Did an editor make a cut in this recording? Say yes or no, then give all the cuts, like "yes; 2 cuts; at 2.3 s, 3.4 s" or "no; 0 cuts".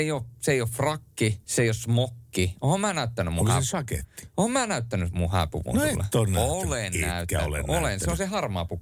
yes; 1 cut; at 1.4 s